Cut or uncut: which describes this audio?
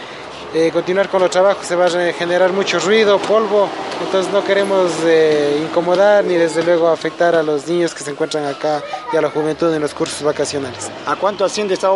uncut